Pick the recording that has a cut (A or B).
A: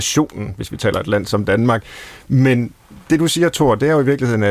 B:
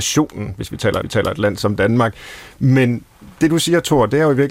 B